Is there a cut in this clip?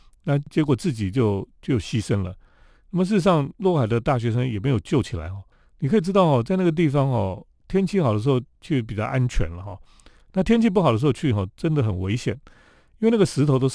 no; 0 cuts

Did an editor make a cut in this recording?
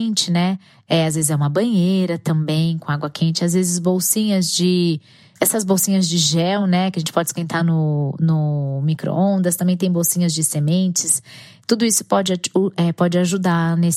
no; 0 cuts

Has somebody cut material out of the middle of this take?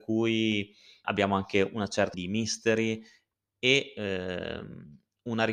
yes; 2 cuts; at 1.0 s, 2.1 s

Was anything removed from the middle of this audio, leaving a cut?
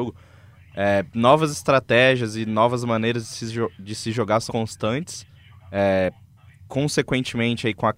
yes; 1 cut; at 4.5 s

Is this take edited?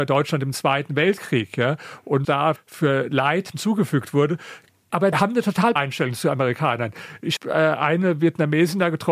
yes; 6 cuts; at 2.2 s, 2.6 s, 3.5 s, 5.1 s, 5.8 s, 7.4 s

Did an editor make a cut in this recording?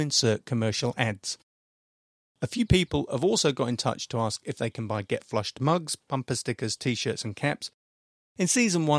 no; 0 cuts

